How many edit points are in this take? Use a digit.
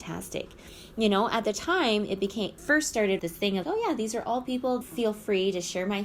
4